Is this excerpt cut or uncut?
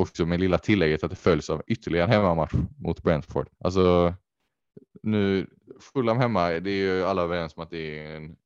cut